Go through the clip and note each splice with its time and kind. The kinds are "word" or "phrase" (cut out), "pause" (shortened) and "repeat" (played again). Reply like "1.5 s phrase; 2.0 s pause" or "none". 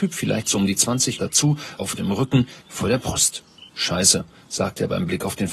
1.2 s word; 1.8 s word; 2.6 s word; 3.7 s pause